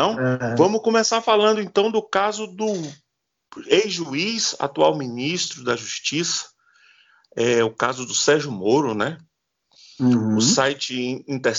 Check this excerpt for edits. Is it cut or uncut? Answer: uncut